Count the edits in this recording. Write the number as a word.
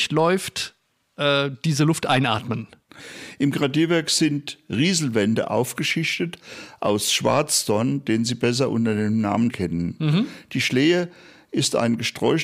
one